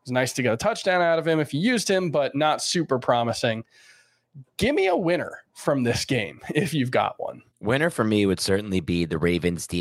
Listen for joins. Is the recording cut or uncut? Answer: cut